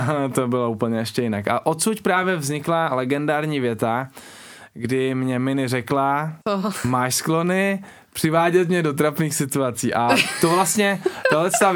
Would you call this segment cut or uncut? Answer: cut